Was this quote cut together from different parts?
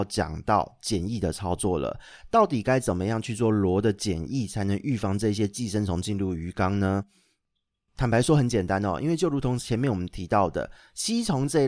no; 0 cuts

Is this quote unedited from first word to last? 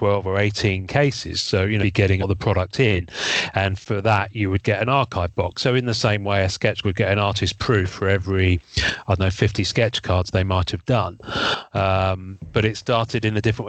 no; 3 cuts; at 1.8 s, 2.2 s, 6.8 s

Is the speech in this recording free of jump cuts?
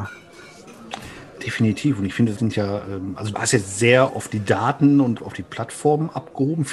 no; 4 cuts; at 2.4 s, 3.3 s, 4.1 s, 5.2 s

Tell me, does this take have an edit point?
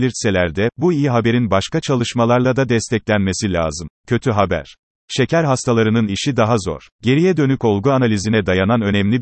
yes; 3 cuts; at 4.0 s, 5.0 s, 6.9 s

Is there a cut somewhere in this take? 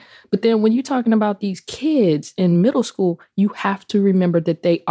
no; 0 cuts

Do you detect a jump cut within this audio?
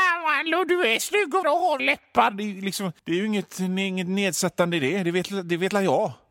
yes; 3 cuts; at 1.4 s, 1.8 s, 3.0 s

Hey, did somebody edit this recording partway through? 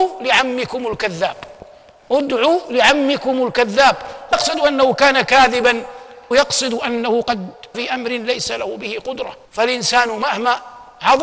yes; 4 cuts; at 4.3 s, 6.3 s, 7.7 s, 9.4 s

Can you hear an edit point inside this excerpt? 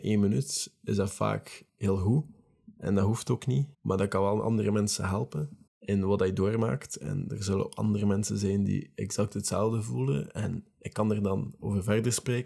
yes; 3 cuts; at 1.7 s, 3.7 s, 5.7 s

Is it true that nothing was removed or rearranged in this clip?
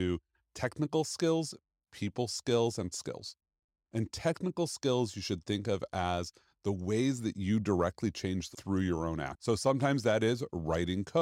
no; 2 cuts; at 2.9 s, 8.5 s

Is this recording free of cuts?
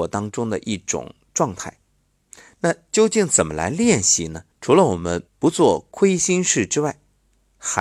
no; 2 cuts; at 4.5 s, 5.3 s

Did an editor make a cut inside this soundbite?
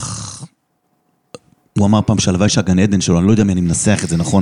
no; 0 cuts

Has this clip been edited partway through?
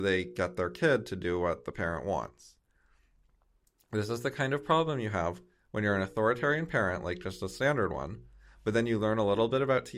no; 0 cuts

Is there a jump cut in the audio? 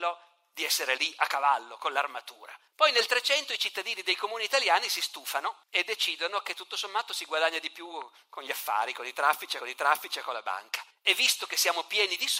yes; 4 cuts; at 2.7 s, 5.6 s, 9.6 s, 10.9 s

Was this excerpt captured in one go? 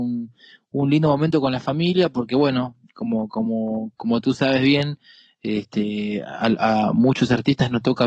yes; 0 cuts

